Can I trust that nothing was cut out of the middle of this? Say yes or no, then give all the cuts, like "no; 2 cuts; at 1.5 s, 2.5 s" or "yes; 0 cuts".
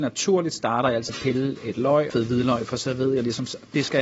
no; 2 cuts; at 1.1 s, 2.1 s